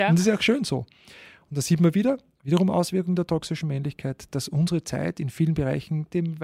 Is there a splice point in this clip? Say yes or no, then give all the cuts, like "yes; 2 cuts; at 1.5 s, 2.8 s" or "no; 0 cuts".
no; 0 cuts